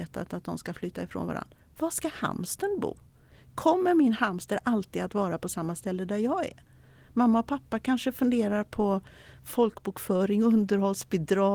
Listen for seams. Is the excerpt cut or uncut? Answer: uncut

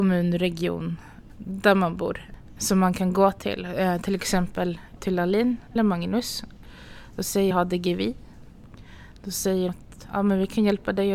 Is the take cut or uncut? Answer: cut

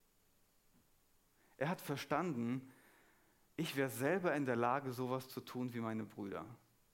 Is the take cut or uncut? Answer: uncut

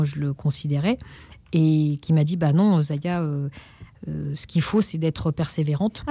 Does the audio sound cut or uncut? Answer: uncut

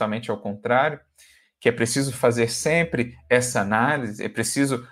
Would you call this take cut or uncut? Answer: uncut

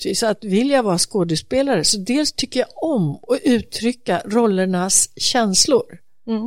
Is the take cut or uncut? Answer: uncut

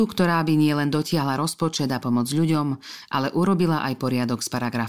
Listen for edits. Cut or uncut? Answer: uncut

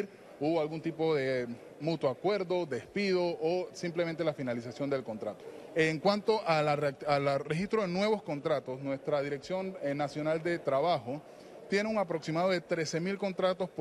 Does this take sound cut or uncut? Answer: uncut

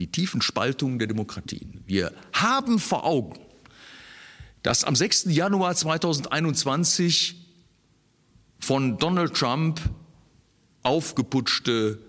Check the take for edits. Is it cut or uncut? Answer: uncut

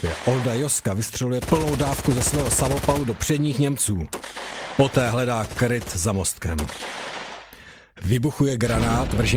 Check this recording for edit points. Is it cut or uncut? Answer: uncut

